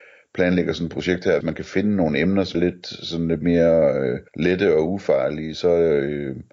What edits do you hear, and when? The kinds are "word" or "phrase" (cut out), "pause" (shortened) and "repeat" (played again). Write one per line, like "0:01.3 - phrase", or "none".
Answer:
0:01.4 - word
0:02.5 - word
0:04.3 - pause